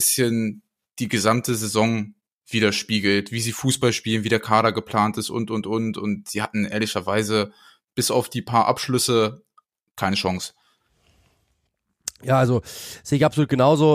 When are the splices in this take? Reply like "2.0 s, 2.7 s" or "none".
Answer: none